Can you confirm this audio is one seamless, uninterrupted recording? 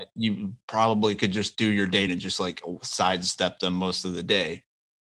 no; 1 cut; at 2.1 s

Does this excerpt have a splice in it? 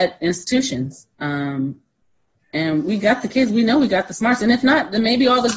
yes; 1 cut; at 1.1 s

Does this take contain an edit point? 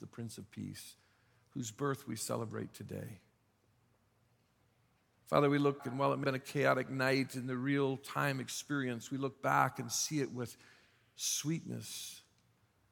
yes; 2 cuts; at 5.8 s, 6.2 s

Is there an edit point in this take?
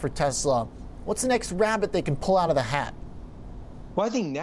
no; 0 cuts

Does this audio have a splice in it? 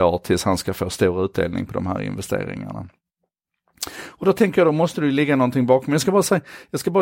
no; 0 cuts

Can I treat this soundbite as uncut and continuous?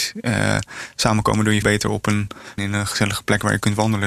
no; 2 cuts; at 1.6 s, 2.6 s

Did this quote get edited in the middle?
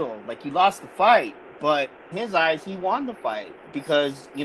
yes; 1 cut; at 2.1 s

